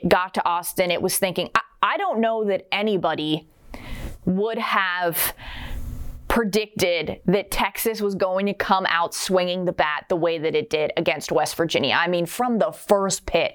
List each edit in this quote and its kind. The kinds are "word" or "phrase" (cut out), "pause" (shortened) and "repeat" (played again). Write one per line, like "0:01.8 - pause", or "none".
none